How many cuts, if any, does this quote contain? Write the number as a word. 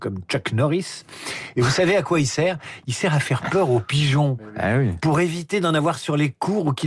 zero